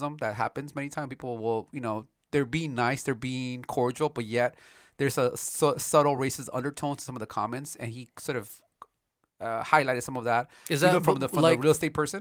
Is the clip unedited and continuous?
yes; 0 cuts

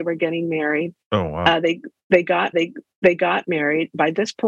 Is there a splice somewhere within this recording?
yes; 1 cut; at 2.5 s

